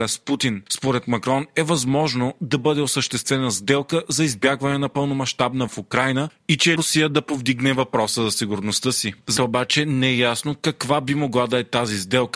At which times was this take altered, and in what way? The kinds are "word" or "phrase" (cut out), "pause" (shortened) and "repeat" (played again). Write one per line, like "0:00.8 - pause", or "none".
0:05.7 - word
0:06.8 - word
0:09.4 - word